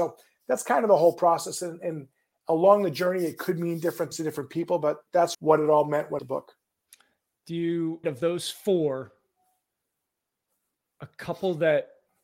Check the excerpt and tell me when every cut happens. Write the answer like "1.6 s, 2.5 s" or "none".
4.1 s, 5.3 s, 6.2 s, 8.0 s